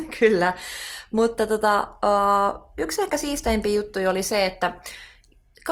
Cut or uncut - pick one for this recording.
uncut